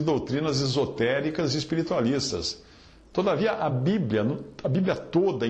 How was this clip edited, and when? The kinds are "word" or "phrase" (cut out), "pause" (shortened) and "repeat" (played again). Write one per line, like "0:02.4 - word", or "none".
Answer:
none